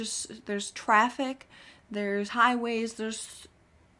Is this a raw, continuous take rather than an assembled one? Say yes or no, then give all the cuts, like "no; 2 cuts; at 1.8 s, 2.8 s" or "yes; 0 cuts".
yes; 0 cuts